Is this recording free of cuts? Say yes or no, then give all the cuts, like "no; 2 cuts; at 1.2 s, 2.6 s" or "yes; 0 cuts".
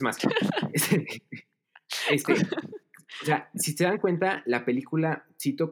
yes; 0 cuts